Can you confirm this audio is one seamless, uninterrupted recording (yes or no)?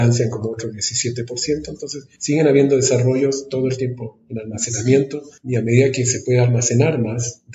yes